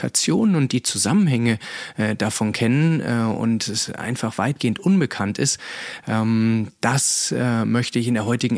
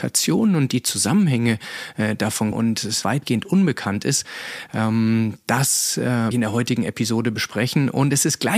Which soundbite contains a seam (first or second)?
second